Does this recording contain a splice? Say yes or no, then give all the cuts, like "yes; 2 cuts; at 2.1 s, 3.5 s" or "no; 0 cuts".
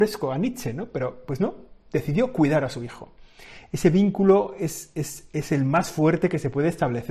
no; 0 cuts